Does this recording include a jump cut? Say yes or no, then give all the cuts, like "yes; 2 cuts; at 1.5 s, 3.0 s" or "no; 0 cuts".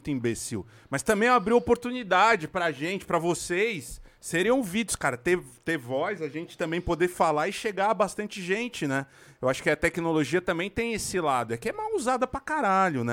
no; 0 cuts